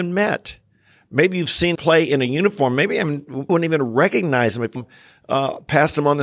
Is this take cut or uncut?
cut